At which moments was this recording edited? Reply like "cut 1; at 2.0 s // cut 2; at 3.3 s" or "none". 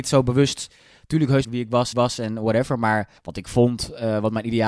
cut 1; at 1.4 s // cut 2; at 1.9 s // cut 3; at 3.2 s